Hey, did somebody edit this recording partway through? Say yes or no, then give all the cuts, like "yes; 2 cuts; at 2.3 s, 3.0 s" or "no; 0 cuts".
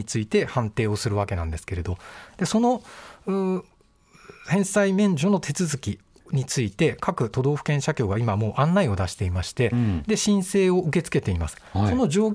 no; 0 cuts